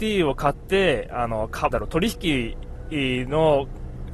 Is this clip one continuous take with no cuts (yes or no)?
no